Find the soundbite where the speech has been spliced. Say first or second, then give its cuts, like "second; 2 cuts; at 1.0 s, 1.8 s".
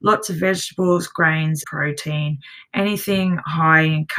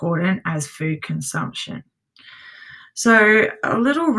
first; 1 cut; at 1.6 s